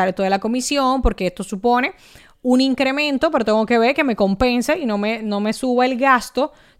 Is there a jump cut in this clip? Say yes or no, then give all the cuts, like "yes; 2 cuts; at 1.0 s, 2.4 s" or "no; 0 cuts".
no; 0 cuts